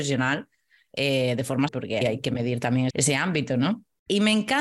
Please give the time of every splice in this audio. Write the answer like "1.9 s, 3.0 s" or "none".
1.7 s, 2.0 s, 2.9 s